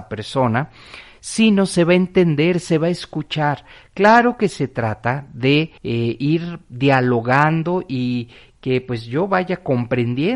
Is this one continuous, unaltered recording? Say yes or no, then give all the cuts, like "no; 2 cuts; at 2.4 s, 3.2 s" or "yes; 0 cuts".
no; 1 cut; at 5.8 s